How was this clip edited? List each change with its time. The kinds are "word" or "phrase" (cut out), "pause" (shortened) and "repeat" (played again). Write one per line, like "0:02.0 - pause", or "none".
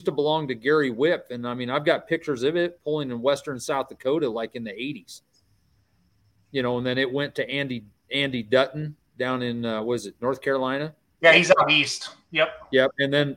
none